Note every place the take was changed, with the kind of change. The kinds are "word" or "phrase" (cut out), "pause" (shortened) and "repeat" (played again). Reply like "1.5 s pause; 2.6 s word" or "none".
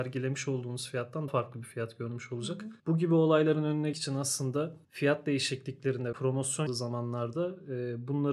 1.3 s word; 2.8 s pause; 3.9 s word; 4.8 s pause; 6.1 s word; 6.7 s word